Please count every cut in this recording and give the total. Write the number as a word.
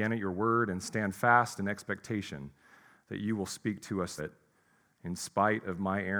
one